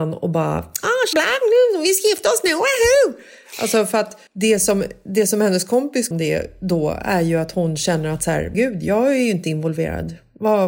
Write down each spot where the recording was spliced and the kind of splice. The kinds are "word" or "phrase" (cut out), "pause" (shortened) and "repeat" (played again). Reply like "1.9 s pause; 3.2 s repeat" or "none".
1.1 s word; 4.3 s pause; 6.1 s phrase; 8.5 s word